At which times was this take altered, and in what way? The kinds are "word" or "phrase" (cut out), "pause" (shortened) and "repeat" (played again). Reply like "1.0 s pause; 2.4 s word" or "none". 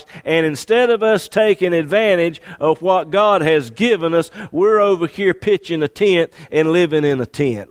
none